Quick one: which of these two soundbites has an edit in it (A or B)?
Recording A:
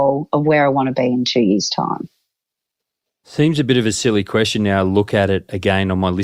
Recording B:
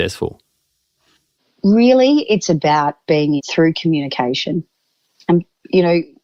B